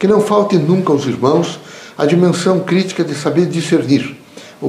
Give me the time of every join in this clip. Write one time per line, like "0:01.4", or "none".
none